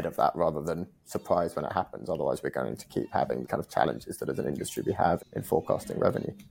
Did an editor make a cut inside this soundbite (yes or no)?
yes